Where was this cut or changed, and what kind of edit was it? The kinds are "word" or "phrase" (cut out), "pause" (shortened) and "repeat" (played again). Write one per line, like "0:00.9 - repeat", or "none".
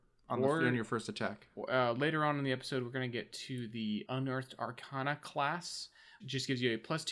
0:04.1 - word
0:06.2 - word